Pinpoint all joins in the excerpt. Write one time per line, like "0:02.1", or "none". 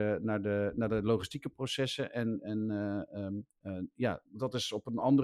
none